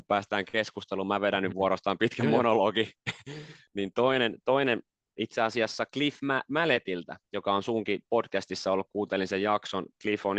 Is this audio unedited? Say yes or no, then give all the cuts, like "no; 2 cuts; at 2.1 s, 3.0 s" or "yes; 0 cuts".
yes; 0 cuts